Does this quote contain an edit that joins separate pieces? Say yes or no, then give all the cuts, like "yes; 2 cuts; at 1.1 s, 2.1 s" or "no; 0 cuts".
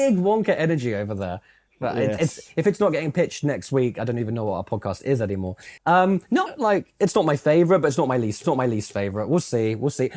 yes; 3 cuts; at 5.8 s, 6.5 s, 8.4 s